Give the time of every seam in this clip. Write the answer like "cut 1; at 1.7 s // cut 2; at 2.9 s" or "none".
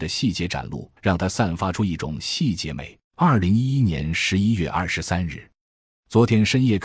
cut 1; at 1.0 s // cut 2; at 3.0 s